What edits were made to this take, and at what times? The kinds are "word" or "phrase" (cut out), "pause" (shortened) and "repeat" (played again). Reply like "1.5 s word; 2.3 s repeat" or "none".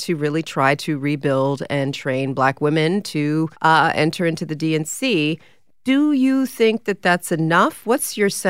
3.5 s pause

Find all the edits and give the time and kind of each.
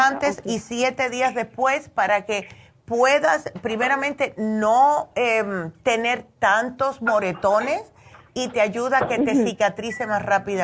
none

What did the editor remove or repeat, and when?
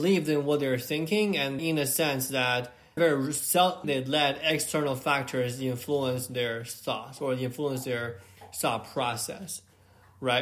1.6 s word; 3.0 s word; 3.8 s word

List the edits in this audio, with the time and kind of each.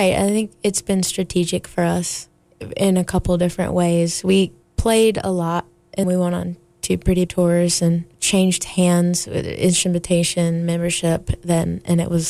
6.0 s phrase; 7.3 s word; 8.1 s pause

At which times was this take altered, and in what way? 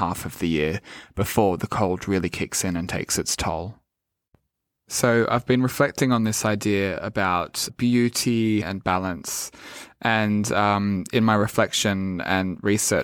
7.7 s word; 8.6 s word

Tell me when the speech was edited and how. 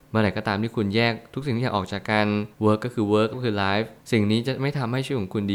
2.5 s pause; 3.3 s word; 4.0 s pause

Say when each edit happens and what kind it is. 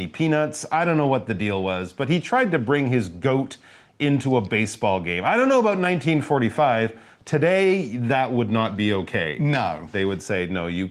none

